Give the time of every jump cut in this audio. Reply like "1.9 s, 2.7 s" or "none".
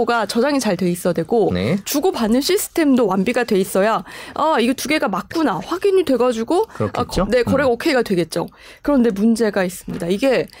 none